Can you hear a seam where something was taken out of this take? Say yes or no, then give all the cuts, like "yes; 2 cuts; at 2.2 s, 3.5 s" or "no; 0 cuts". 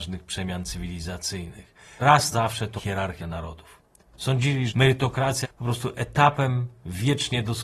yes; 6 cuts; at 2.0 s, 2.3 s, 2.8 s, 3.2 s, 4.7 s, 5.4 s